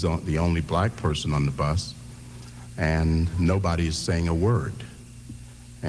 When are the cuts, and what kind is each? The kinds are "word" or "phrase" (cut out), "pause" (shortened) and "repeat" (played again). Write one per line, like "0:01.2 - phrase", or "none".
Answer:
none